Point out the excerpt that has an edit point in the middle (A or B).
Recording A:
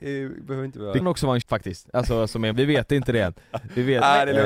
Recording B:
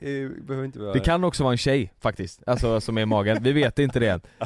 A